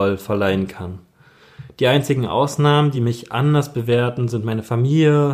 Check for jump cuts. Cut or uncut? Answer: uncut